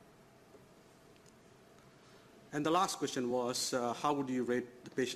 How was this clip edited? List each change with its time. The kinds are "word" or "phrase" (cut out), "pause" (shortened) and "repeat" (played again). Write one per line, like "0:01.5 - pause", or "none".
none